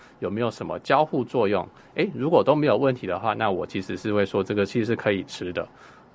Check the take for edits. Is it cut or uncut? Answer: uncut